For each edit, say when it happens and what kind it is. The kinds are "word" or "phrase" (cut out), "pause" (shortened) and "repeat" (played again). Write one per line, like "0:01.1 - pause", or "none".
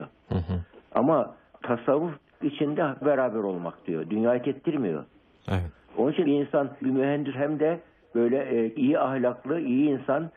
0:01.6 - word
0:02.4 - word
0:03.0 - word
0:04.4 - word
0:06.2 - word
0:06.8 - word
0:07.3 - word
0:08.8 - word